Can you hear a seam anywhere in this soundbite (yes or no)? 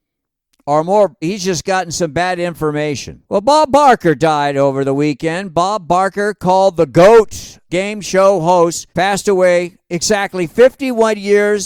yes